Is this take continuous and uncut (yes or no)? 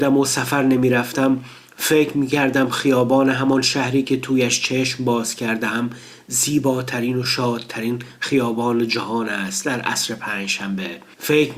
yes